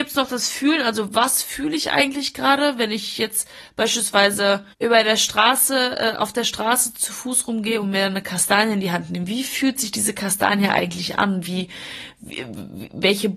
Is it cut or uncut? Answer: cut